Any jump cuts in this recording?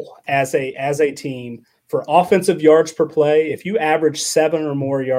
no; 0 cuts

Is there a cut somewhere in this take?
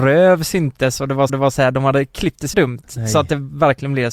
yes; 2 cuts; at 1.3 s, 2.5 s

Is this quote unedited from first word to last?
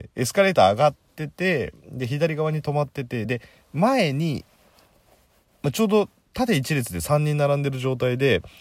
yes; 0 cuts

